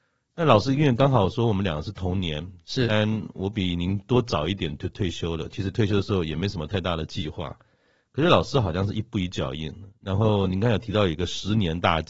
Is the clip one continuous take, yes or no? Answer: yes